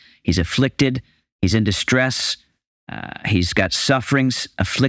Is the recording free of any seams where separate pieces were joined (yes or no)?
yes